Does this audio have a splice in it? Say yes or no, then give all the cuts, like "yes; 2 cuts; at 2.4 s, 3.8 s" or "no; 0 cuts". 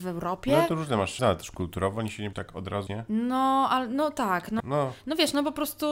yes; 4 cuts; at 1.2 s, 2.3 s, 2.9 s, 4.6 s